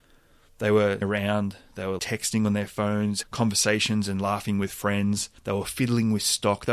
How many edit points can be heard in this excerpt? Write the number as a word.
four